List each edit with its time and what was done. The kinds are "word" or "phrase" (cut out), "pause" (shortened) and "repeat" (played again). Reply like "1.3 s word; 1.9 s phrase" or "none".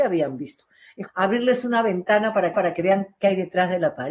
1.1 s word; 2.5 s repeat